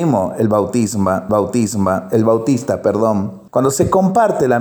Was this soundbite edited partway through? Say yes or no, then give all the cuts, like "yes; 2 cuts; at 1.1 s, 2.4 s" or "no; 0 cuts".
yes; 2 cuts; at 1.3 s, 3.5 s